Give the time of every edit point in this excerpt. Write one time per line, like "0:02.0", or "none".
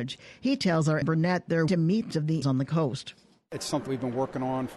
0:01.0
0:01.7
0:02.1
0:02.4
0:03.9